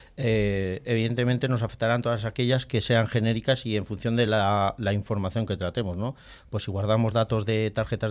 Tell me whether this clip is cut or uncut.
uncut